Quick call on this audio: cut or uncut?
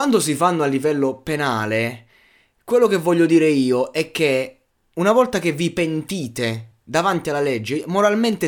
uncut